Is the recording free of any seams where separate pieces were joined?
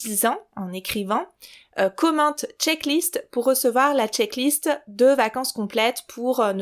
yes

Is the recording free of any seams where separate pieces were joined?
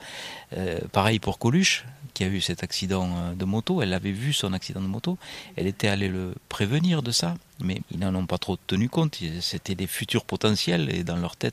no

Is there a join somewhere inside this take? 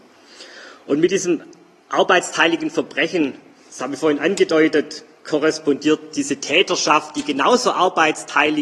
no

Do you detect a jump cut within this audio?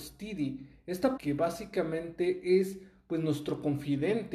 yes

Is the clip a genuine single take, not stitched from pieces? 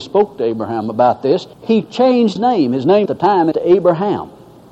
no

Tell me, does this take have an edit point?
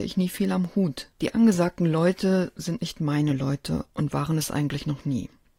yes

